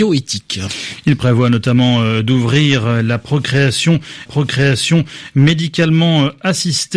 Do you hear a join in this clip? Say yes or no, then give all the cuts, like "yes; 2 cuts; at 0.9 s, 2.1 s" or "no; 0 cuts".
yes; 1 cut; at 4.3 s